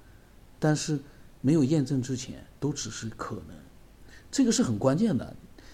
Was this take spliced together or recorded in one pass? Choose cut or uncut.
cut